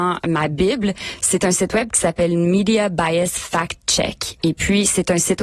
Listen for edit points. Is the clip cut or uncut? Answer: uncut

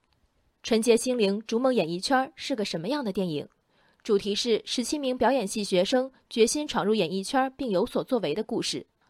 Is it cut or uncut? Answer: uncut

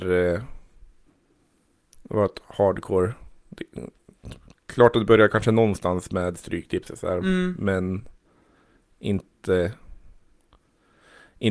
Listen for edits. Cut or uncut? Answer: uncut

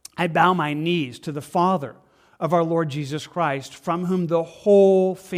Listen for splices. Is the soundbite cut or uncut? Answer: uncut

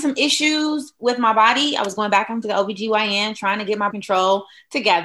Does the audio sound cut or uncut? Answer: cut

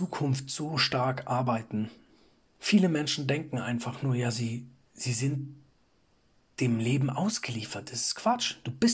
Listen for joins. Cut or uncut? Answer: uncut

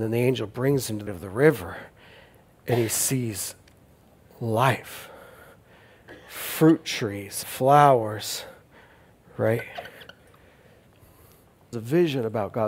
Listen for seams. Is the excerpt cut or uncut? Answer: cut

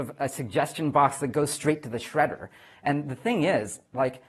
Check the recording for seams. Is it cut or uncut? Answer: uncut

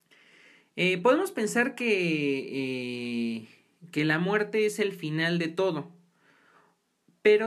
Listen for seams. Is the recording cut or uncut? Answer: uncut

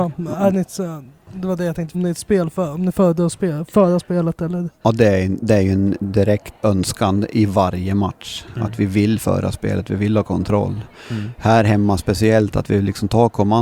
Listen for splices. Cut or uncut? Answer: cut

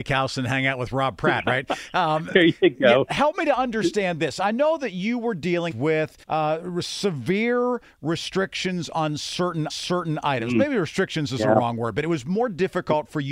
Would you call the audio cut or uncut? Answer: cut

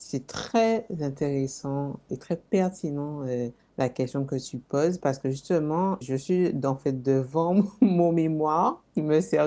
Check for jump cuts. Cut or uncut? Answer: cut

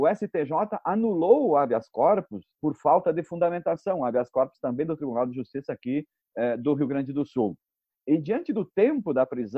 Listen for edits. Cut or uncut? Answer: cut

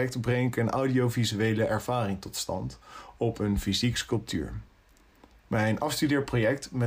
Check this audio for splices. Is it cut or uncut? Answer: uncut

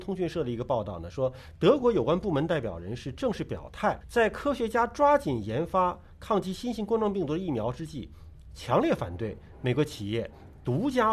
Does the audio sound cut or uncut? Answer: cut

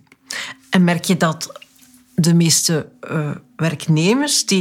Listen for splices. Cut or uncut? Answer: uncut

